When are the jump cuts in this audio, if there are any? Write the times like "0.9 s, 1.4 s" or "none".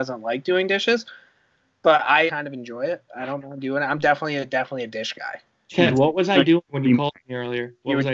2.3 s

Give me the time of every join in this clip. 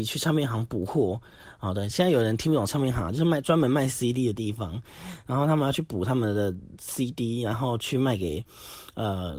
none

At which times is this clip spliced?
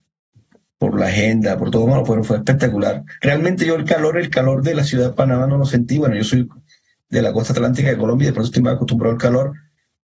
none

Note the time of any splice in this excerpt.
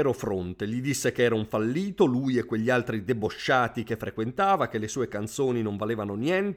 none

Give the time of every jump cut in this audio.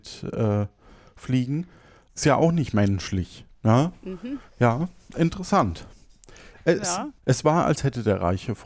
7.2 s

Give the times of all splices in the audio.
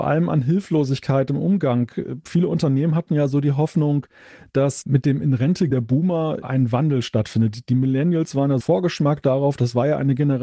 5.7 s, 6.4 s, 8.6 s

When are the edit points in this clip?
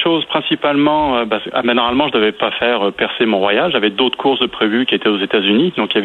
none

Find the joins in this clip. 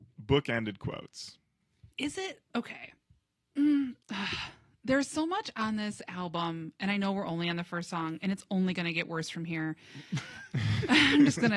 1.9 s, 4.0 s

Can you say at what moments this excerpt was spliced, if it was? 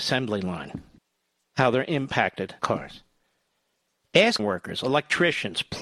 1.0 s, 2.6 s, 4.4 s

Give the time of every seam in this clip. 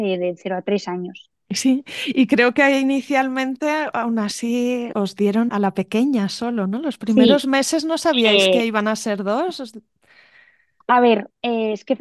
4.9 s, 5.5 s

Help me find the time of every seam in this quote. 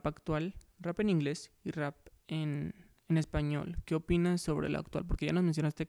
none

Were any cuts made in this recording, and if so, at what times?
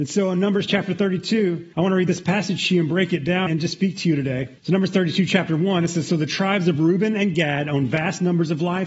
1.7 s, 3.5 s, 4.6 s

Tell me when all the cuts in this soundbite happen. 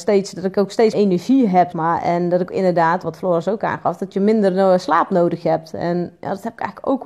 0.9 s, 1.7 s, 2.5 s, 3.0 s

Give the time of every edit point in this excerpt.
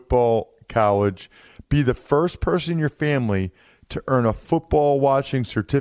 none

